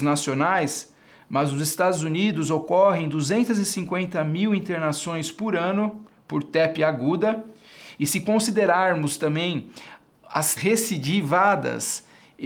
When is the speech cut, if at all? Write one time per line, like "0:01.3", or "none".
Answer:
0:10.6